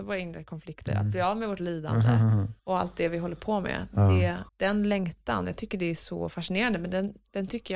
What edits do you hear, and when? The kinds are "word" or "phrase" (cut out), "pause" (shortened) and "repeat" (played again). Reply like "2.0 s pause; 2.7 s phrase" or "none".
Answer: 2.6 s pause; 4.5 s pause